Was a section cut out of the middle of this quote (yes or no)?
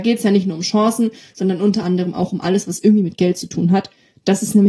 no